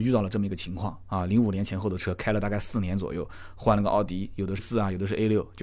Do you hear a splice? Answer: yes; 1 cut; at 4.6 s

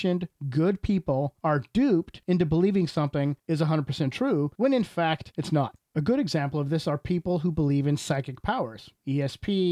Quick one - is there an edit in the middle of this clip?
no; 0 cuts

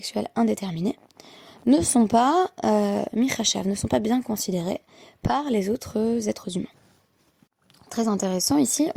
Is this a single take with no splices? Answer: yes; 0 cuts

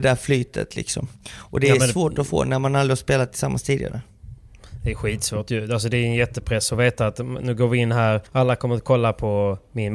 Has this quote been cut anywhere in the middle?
yes; 1 cut; at 8.3 s

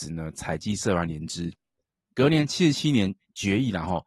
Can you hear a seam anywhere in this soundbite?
no; 0 cuts

